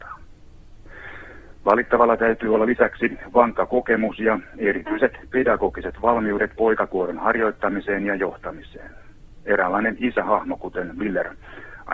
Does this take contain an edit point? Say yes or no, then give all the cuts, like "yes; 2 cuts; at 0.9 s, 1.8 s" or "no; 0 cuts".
no; 0 cuts